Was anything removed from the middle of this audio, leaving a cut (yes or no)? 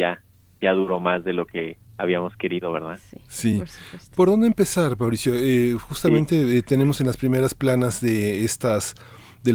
yes